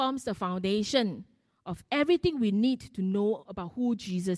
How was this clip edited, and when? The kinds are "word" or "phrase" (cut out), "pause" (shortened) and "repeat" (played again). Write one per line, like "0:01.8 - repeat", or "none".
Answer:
none